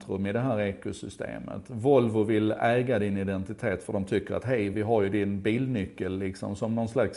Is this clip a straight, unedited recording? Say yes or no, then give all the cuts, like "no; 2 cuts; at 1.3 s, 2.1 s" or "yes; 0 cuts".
yes; 0 cuts